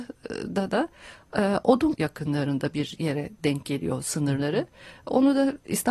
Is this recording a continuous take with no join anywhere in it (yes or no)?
no